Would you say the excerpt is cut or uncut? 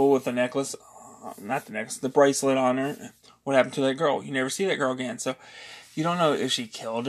uncut